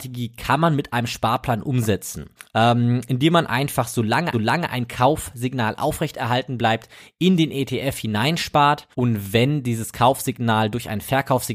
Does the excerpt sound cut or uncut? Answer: cut